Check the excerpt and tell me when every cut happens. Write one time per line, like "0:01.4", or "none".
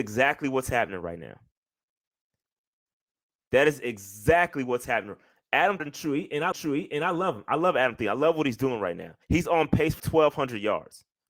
0:05.8
0:06.5
0:09.2
0:10.0